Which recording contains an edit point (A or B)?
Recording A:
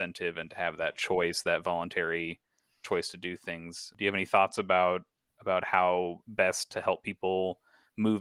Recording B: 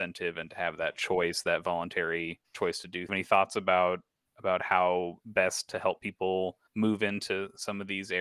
B